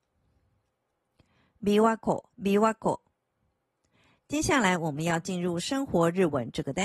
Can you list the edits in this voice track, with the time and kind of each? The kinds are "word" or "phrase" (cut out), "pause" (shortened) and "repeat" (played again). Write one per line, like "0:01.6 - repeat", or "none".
0:02.3 - pause